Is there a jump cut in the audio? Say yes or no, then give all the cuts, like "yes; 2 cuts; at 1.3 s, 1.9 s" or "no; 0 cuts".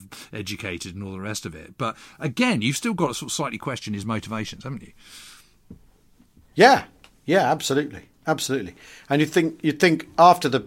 no; 0 cuts